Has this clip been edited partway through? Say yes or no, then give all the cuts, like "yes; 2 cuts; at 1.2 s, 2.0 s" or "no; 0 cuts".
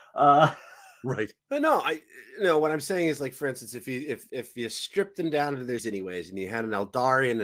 yes; 3 cuts; at 1.4 s, 4.3 s, 5.8 s